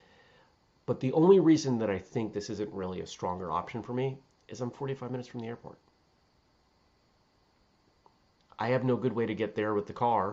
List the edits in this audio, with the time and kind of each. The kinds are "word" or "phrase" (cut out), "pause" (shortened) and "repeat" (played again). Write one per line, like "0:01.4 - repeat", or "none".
none